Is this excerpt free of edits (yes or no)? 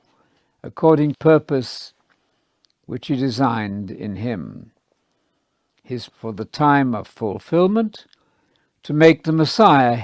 no